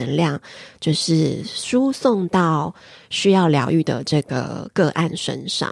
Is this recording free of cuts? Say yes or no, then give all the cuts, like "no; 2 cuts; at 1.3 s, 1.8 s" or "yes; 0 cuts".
yes; 0 cuts